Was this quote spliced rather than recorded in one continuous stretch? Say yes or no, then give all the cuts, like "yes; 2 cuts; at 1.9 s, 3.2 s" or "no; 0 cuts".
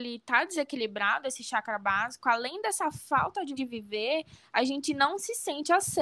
yes; 1 cut; at 3.6 s